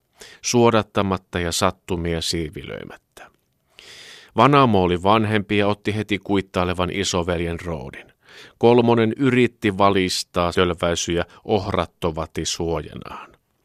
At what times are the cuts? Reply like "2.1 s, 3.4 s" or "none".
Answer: 10.5 s